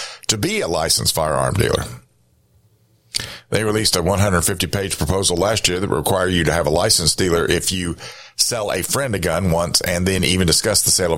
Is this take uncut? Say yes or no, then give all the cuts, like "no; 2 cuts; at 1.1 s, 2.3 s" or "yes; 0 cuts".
yes; 0 cuts